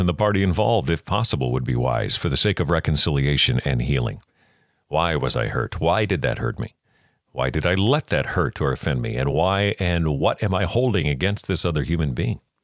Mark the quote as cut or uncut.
uncut